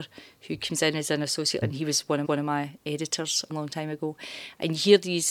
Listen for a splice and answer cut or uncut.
cut